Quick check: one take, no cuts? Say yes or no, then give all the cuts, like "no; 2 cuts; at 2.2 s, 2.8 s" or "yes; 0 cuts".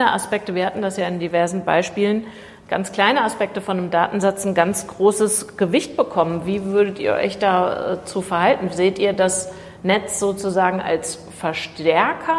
yes; 0 cuts